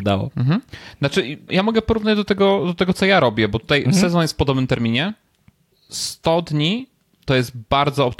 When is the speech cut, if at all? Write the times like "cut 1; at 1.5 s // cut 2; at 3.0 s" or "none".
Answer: cut 1; at 1.5 s